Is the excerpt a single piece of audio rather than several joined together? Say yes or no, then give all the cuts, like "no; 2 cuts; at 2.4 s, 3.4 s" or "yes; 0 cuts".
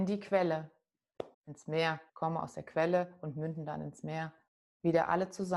no; 3 cuts; at 1.3 s, 2.1 s, 4.5 s